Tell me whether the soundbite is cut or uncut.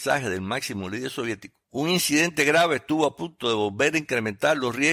cut